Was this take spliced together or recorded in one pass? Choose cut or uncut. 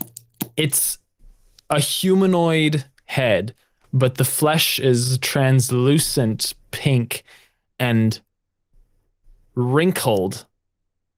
uncut